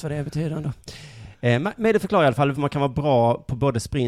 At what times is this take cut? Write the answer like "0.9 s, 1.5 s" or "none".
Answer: 2.5 s